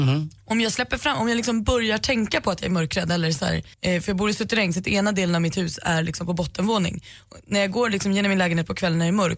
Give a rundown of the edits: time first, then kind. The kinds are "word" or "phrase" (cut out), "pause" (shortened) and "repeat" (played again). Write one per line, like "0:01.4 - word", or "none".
0:03.7 - pause